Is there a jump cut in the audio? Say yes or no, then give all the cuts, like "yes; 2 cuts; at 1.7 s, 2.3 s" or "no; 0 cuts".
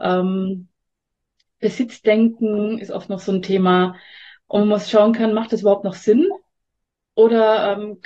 no; 0 cuts